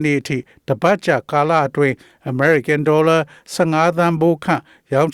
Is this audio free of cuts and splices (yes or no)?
yes